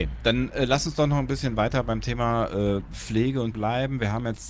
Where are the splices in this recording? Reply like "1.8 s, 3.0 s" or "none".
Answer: 3.5 s